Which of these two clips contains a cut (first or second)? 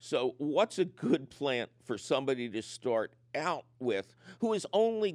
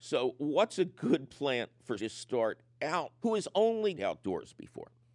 second